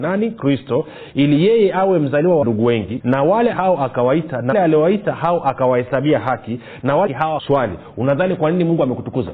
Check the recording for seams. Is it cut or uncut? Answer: cut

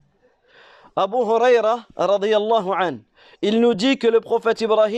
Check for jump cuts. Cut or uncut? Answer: uncut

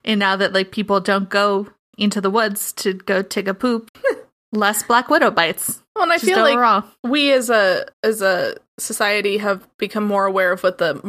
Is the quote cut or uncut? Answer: cut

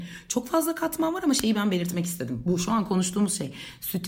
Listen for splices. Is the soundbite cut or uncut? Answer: uncut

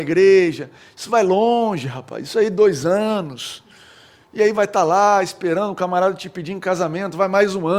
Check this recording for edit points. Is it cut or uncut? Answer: cut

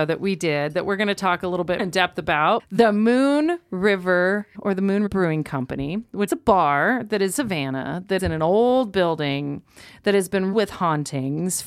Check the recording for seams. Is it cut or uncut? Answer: cut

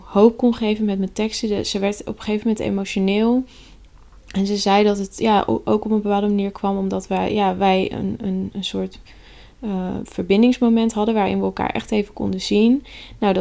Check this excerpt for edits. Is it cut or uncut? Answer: uncut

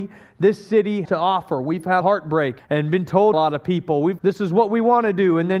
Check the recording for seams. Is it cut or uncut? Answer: cut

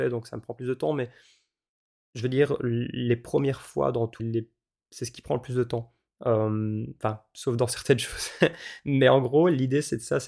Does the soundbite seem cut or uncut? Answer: cut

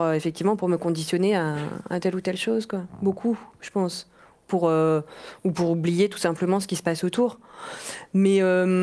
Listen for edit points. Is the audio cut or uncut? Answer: uncut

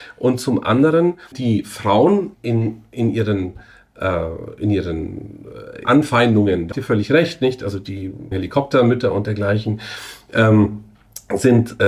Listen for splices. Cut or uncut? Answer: cut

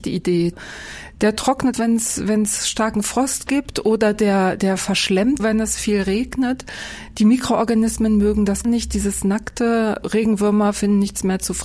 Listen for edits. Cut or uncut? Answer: cut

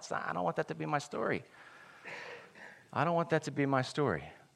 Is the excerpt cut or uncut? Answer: uncut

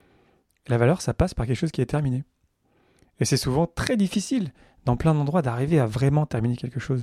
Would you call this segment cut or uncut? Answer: uncut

